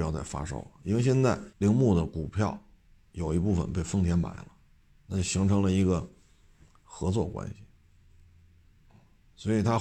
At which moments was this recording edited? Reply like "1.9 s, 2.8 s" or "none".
1.5 s